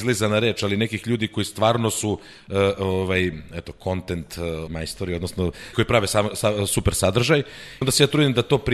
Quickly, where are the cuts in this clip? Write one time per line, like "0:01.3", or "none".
0:04.7
0:05.7
0:07.8